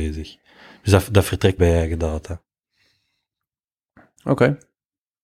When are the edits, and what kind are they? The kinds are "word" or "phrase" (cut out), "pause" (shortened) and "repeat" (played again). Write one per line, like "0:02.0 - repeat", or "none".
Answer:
0:01.6 - word

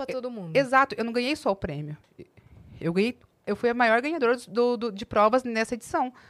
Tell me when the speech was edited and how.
none

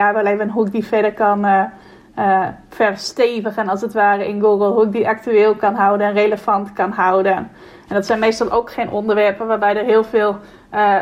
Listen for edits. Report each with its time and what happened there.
none

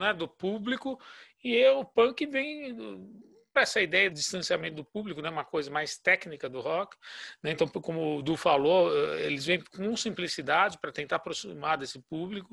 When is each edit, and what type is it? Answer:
0:03.6 - word
0:04.1 - word

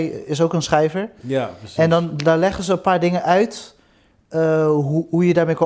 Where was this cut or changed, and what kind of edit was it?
none

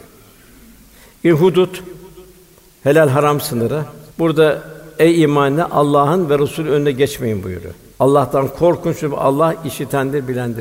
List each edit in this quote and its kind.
0:04.1 - pause
0:07.9 - pause

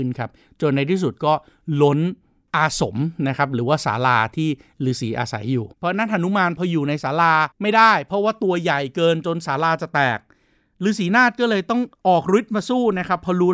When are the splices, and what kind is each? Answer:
0:05.7 - pause
0:07.5 - pause

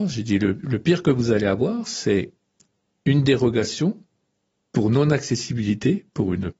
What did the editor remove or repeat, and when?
none

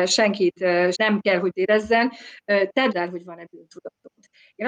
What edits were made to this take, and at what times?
0:00.9 - word
0:01.5 - word
0:02.9 - word

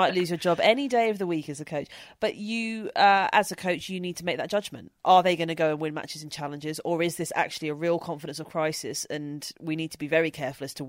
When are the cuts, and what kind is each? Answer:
0:05.0 - pause

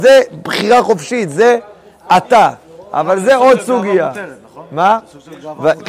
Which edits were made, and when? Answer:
none

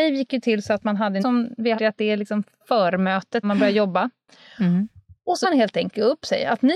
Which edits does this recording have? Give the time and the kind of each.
0:01.2 - word
0:01.8 - word
0:03.4 - word
0:05.4 - word

